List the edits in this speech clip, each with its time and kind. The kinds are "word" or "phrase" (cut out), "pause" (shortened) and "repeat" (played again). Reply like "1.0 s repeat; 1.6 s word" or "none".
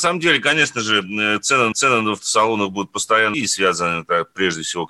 1.7 s repeat; 3.3 s word